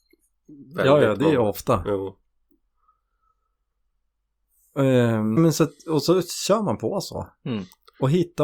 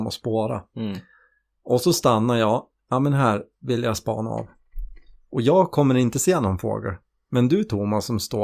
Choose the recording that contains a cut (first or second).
first